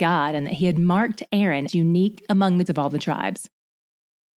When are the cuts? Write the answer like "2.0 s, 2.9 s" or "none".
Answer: 1.7 s, 2.7 s